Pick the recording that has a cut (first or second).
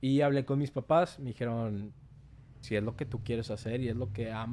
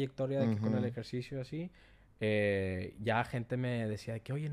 first